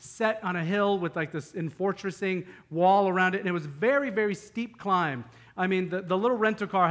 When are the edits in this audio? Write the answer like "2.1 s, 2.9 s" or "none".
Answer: none